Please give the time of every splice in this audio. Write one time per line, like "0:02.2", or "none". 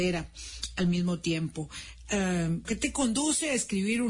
0:02.6

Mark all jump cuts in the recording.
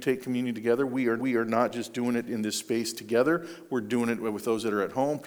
0:01.2

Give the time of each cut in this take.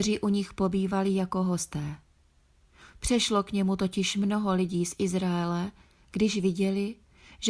none

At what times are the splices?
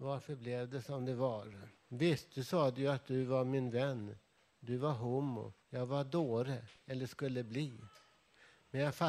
0:01.8
0:05.6

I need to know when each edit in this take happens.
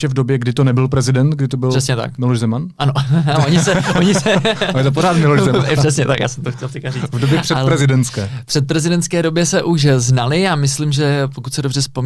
none

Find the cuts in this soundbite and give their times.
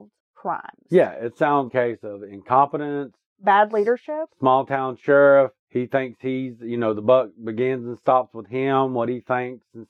0:01.7
0:05.6

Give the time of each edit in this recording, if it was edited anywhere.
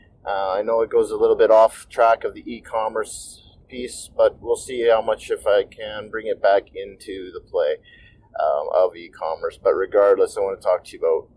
none

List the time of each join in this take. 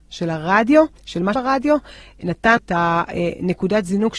0:01.0
0:01.3
0:02.6

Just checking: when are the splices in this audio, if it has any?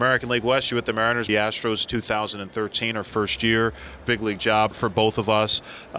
0:01.3
0:04.0
0:04.7

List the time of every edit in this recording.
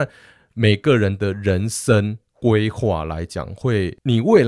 0:02.2

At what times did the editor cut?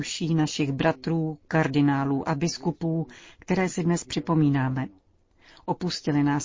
none

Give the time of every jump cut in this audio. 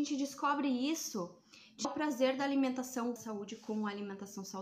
0:01.8
0:03.2

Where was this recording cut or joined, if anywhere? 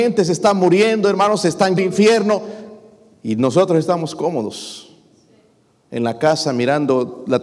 0:01.8

